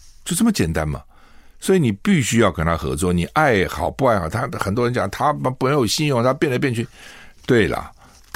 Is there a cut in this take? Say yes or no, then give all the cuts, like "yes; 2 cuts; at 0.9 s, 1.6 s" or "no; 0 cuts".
no; 0 cuts